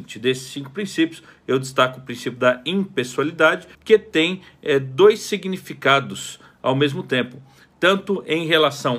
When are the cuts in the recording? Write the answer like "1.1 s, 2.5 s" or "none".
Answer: 3.7 s